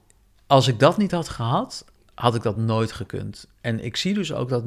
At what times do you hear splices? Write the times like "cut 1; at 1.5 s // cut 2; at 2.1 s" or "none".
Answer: none